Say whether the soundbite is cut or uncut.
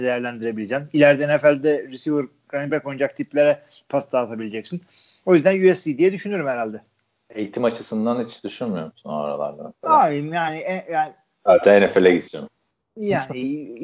uncut